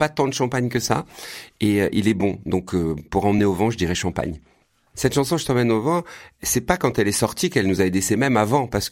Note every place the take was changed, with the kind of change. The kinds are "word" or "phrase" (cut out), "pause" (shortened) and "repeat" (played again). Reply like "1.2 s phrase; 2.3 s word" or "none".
none